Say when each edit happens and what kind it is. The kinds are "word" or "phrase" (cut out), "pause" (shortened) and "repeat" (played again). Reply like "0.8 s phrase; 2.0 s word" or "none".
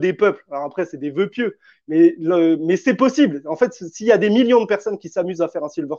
none